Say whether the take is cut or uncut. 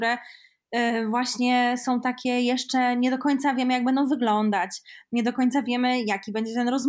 uncut